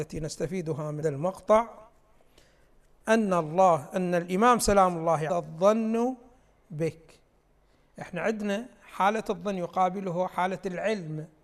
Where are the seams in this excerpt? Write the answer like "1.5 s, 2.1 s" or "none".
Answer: 1.0 s, 5.3 s